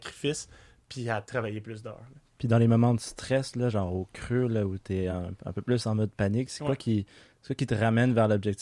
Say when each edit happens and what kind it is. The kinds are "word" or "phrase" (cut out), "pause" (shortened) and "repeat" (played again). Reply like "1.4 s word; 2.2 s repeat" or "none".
none